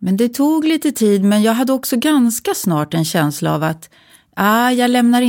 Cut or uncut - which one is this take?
uncut